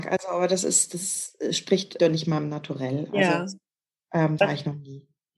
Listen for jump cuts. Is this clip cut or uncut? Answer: cut